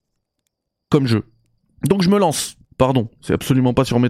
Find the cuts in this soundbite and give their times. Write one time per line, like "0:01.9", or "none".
0:01.6
0:02.6